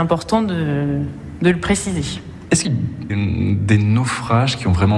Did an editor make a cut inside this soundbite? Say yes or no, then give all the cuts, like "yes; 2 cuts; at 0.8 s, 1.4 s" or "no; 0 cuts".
yes; 2 cuts; at 2.6 s, 3.1 s